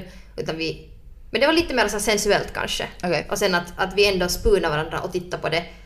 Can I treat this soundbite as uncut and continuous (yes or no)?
yes